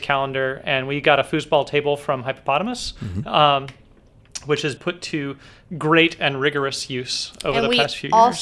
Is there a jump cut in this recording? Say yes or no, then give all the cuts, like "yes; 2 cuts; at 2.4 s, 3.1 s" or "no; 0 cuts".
yes; 1 cut; at 4.8 s